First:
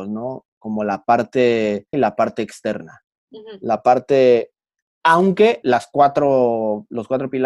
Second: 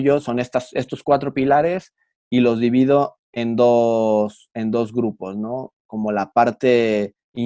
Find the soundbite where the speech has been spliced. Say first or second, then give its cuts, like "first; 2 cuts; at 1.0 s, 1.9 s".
first; 2 cuts; at 1.9 s, 5.6 s